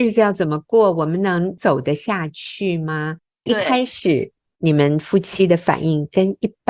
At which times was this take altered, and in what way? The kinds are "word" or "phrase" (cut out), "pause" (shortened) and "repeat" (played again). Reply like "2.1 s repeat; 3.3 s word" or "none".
none